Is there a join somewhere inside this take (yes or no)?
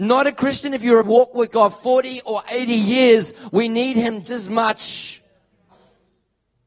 yes